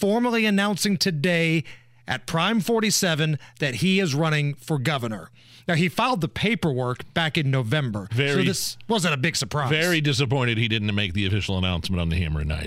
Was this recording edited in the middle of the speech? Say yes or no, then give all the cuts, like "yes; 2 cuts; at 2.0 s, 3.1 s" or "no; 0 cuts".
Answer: no; 0 cuts